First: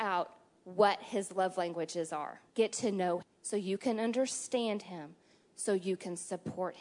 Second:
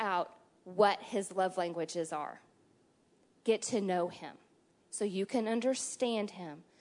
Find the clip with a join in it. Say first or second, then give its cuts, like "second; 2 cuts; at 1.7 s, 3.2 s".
first; 2 cuts; at 2.5 s, 3.2 s